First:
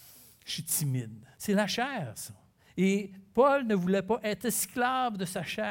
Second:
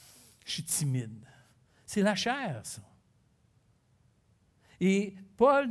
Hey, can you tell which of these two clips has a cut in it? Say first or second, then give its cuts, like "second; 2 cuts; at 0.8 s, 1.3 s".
first; 2 cuts; at 1.3 s, 2.6 s